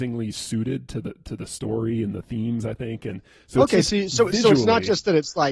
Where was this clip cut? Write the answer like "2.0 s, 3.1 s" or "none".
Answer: none